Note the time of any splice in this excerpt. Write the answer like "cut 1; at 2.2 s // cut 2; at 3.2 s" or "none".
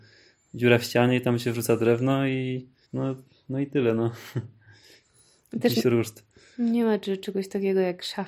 cut 1; at 2.8 s // cut 2; at 5.8 s